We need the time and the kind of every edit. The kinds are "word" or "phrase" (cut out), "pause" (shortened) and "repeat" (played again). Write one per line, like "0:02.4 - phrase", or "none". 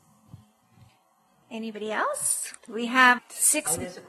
0:02.6 - pause
0:03.2 - word